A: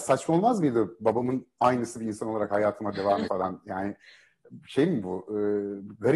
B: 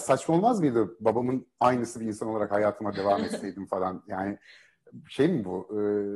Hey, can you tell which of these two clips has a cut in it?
A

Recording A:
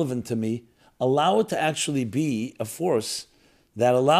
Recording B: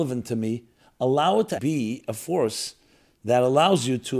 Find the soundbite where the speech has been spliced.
B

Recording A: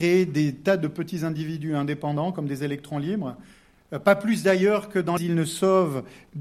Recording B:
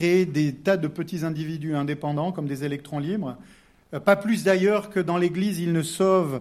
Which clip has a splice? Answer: A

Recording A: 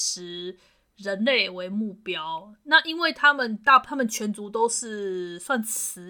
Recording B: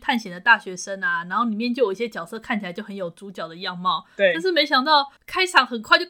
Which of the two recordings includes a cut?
B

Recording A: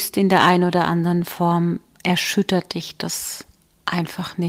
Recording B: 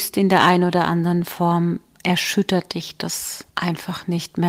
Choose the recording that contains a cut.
B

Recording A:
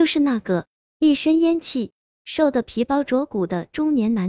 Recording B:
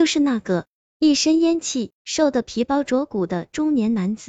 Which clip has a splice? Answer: B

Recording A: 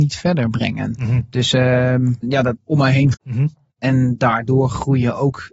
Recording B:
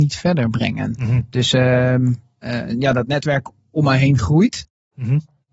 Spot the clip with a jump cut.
A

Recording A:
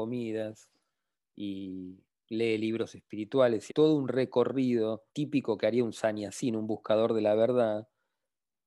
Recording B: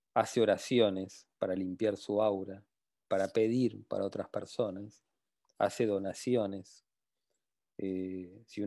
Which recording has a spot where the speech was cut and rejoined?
A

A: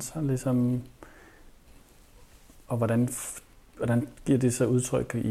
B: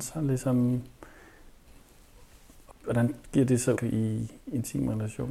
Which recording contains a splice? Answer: B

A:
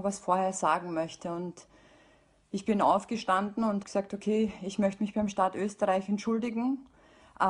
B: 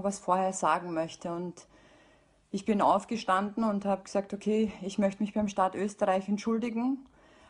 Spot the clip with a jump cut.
A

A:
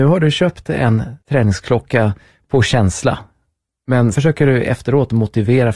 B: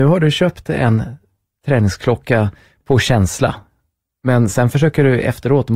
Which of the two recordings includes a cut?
A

